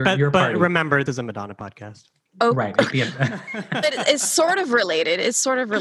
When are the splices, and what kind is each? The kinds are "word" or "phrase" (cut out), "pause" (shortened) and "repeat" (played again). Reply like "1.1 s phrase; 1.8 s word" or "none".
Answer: 1.1 s word; 2.9 s word; 3.8 s word